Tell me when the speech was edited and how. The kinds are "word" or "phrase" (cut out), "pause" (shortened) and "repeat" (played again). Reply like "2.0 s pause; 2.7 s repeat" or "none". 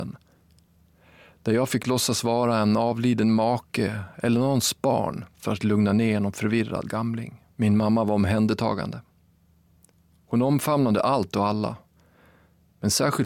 5.3 s pause; 7.5 s pause